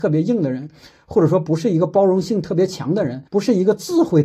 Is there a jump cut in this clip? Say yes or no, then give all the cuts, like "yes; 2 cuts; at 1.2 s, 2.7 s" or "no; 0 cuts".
yes; 1 cut; at 3.3 s